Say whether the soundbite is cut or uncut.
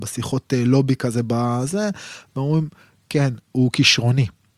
uncut